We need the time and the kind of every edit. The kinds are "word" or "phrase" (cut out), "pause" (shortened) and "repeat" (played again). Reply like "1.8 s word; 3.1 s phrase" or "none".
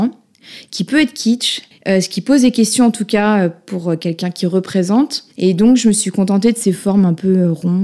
1.7 s pause; 5.3 s pause